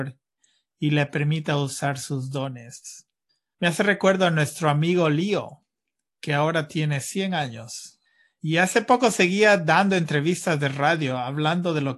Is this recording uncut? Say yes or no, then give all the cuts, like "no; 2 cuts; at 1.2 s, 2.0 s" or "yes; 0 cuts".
yes; 0 cuts